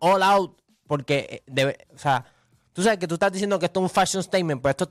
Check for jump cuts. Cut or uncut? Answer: uncut